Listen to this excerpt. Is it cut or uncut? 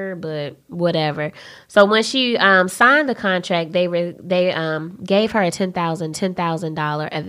cut